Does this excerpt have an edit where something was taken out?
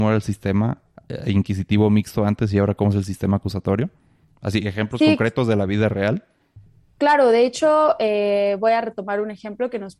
no; 0 cuts

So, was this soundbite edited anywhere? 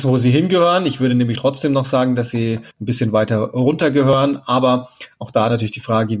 yes; 2 cuts; at 1.4 s, 2.7 s

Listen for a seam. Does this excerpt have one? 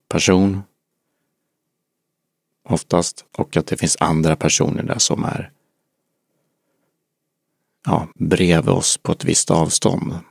yes; 2 cuts; at 3.3 s, 8.1 s

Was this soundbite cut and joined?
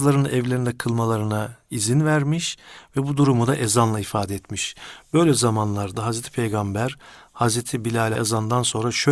yes; 1 cut; at 8.2 s

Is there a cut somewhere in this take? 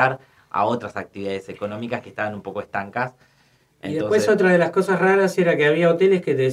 no; 0 cuts

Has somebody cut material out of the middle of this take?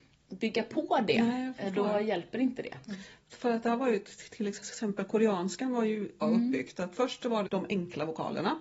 yes; 2 cuts; at 6.2 s, 7.5 s

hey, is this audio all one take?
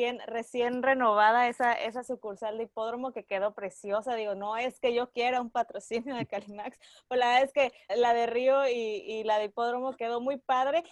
no; 2 cuts; at 7.9 s, 10.0 s

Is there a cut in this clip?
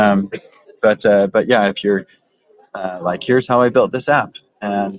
no; 0 cuts

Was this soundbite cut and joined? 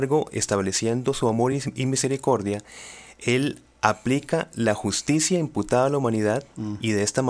no; 0 cuts

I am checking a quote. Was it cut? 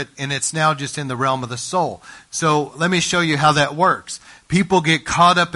no; 0 cuts

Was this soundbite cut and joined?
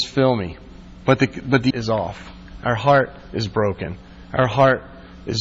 yes; 1 cut; at 1.7 s

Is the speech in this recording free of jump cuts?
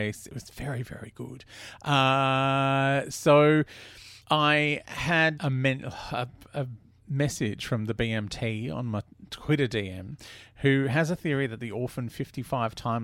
no; 2 cuts; at 4.2 s, 5.4 s

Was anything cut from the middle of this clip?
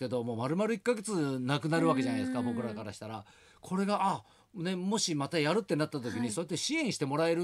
no; 0 cuts

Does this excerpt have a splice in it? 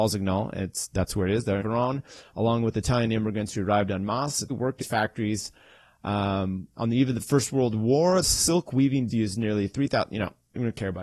yes; 5 cuts; at 1.6 s, 4.5 s, 4.8 s, 8.2 s, 9.1 s

